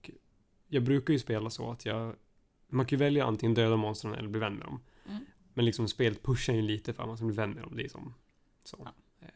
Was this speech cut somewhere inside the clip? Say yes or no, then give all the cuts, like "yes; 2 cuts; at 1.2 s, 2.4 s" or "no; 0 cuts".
no; 0 cuts